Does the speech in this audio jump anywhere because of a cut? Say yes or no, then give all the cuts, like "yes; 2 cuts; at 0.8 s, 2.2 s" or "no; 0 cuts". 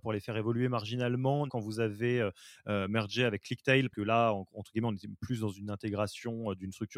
yes; 2 cuts; at 1.5 s, 3.9 s